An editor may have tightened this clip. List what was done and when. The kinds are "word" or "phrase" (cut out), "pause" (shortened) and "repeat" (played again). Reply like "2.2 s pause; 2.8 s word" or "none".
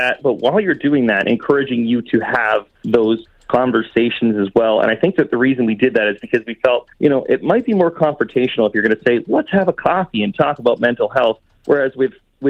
2.7 s pause; 6.9 s pause